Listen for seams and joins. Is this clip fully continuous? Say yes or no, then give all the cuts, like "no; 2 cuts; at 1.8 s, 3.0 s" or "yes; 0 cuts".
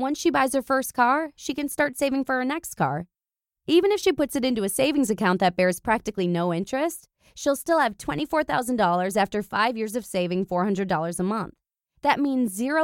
yes; 0 cuts